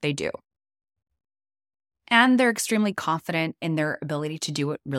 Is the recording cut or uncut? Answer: uncut